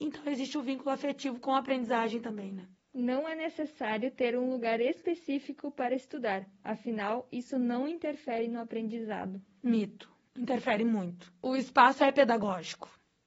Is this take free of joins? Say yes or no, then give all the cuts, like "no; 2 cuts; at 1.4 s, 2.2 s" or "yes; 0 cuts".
no; 1 cut; at 2.8 s